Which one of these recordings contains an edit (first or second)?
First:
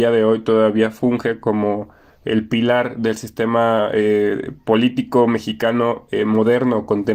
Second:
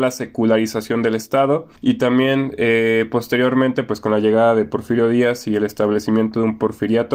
second